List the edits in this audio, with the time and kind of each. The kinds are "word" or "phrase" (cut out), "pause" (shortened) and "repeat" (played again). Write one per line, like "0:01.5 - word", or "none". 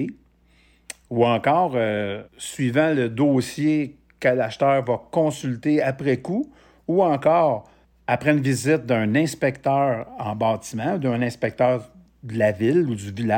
0:02.3 - pause
0:07.8 - pause

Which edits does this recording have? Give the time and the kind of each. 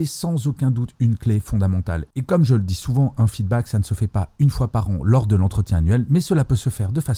none

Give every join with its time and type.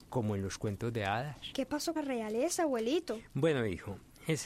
0:02.0 - word

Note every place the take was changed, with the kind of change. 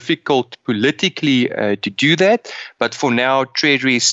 none

